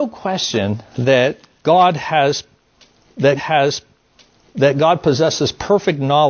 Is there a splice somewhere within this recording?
yes; 1 cut; at 3.4 s

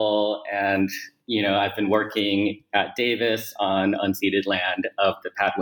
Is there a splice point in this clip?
no; 0 cuts

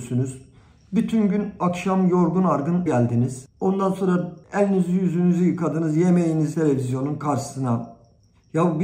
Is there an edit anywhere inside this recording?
yes; 3 cuts; at 2.9 s, 4.4 s, 6.5 s

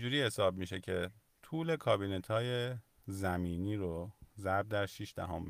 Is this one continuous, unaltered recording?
no; 1 cut; at 4.3 s

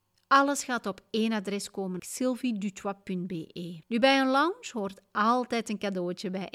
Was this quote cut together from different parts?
yes; 2 cuts; at 2.0 s, 3.8 s

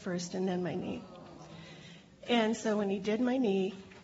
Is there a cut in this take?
no; 0 cuts

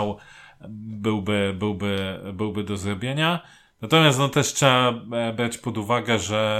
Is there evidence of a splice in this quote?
no; 0 cuts

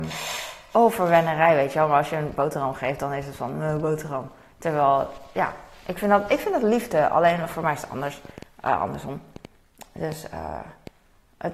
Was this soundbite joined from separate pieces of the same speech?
no; 0 cuts

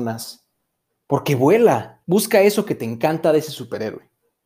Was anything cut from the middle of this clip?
yes; 1 cut; at 2.0 s

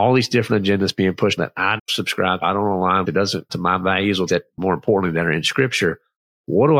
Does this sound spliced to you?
yes; 6 cuts; at 1.4 s, 1.8 s, 2.4 s, 3.0 s, 3.5 s, 4.3 s

